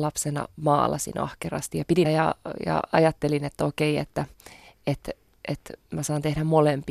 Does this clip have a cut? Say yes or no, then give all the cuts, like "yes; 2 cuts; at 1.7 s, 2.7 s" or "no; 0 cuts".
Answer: yes; 1 cut; at 2.0 s